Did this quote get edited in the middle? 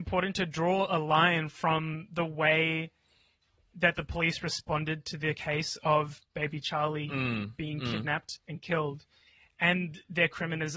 no; 0 cuts

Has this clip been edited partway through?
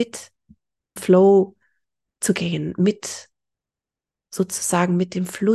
yes; 1 cut; at 1.0 s

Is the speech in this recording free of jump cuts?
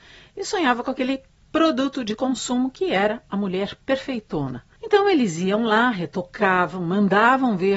yes; 0 cuts

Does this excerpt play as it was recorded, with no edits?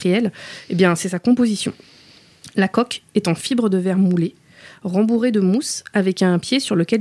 yes; 0 cuts

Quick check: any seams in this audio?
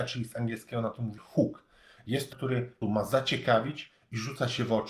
yes; 3 cuts; at 1.2 s, 2.3 s, 2.8 s

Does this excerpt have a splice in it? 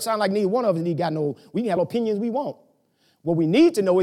yes; 1 cut; at 1.8 s

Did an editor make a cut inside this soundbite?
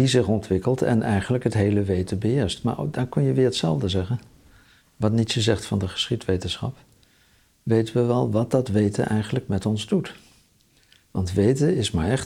no; 0 cuts

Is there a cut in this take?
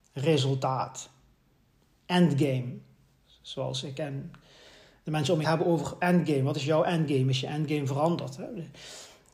yes; 1 cut; at 5.4 s

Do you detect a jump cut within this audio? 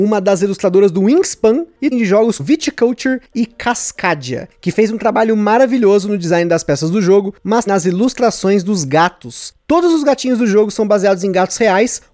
yes; 3 cuts; at 1.9 s, 2.4 s, 7.7 s

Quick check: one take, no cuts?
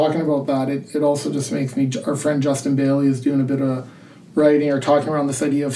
yes; 0 cuts

